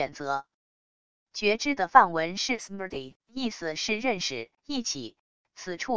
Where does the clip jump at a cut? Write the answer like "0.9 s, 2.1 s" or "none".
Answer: 3.2 s, 4.6 s